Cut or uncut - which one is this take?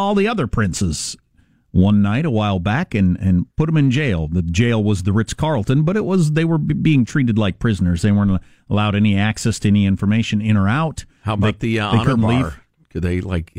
cut